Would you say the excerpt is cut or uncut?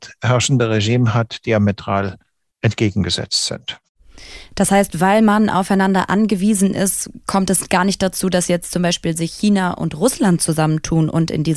uncut